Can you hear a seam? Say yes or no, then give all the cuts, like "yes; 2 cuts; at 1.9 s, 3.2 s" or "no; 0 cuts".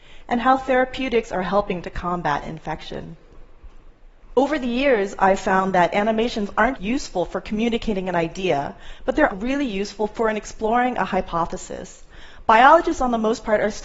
yes; 2 cuts; at 6.8 s, 9.3 s